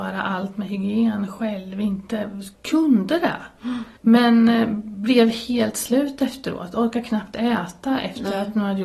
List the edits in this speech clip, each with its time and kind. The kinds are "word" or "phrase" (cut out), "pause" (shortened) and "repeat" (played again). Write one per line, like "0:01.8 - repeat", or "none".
0:02.5 - pause
0:04.0 - pause